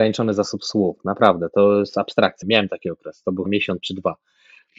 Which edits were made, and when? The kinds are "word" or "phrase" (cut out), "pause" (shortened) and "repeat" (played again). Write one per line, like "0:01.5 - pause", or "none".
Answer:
0:02.4 - phrase
0:03.5 - word